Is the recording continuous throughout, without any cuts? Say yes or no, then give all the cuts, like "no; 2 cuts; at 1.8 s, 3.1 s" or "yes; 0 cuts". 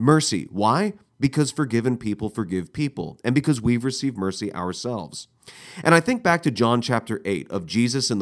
yes; 0 cuts